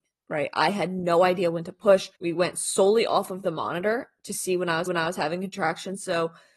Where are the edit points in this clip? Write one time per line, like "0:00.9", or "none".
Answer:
0:02.2
0:04.9